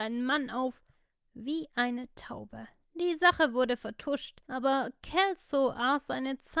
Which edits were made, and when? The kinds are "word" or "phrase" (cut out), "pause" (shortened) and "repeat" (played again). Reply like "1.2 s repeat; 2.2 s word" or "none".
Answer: 2.8 s pause; 4.4 s pause